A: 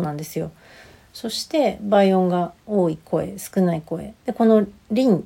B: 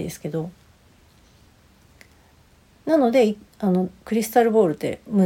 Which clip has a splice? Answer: A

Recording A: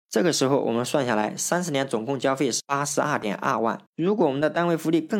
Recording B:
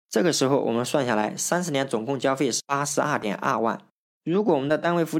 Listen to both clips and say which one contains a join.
A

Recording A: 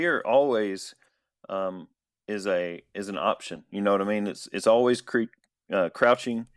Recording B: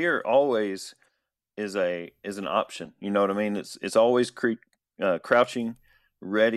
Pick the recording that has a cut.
B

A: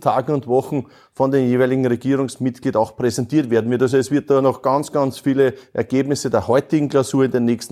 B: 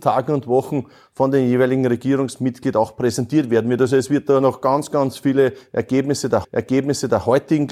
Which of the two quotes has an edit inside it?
B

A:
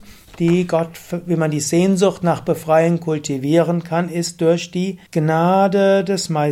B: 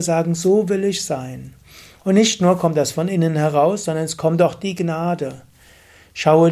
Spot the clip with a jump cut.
A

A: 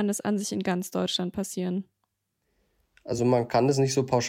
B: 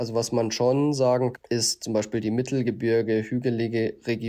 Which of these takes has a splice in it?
B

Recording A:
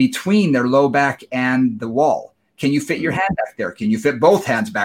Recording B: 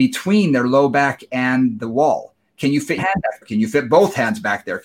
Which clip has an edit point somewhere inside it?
B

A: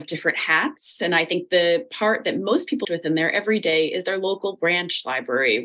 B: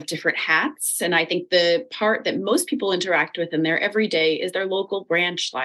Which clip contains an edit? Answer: A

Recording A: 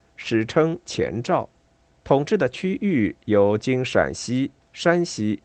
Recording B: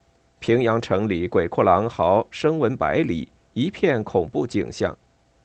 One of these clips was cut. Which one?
A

